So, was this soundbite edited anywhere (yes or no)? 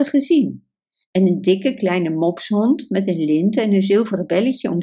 no